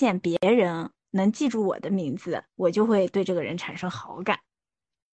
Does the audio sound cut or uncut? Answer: cut